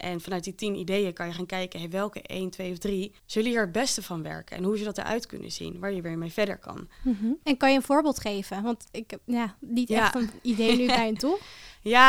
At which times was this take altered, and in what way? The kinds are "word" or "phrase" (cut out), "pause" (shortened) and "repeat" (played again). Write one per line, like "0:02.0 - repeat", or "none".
0:03.2 - pause
0:07.4 - pause